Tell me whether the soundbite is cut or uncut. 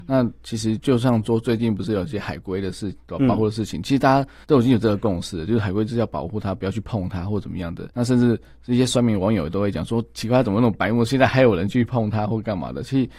cut